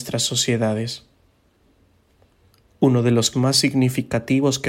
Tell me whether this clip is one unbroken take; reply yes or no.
no